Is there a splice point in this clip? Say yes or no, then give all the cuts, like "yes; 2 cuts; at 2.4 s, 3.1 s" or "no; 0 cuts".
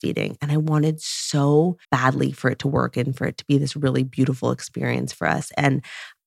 yes; 1 cut; at 1.8 s